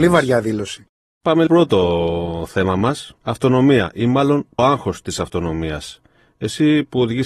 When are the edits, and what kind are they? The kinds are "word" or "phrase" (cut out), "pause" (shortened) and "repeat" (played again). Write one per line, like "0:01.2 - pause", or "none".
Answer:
0:01.5 - phrase
0:03.2 - pause
0:04.6 - word